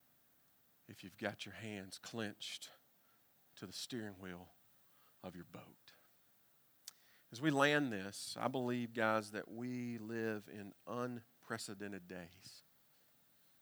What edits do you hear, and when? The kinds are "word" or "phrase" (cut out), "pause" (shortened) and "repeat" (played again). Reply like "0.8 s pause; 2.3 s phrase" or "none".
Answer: none